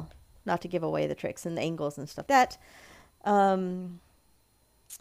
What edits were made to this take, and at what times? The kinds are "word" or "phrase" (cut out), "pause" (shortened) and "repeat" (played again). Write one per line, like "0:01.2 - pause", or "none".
0:02.3 - word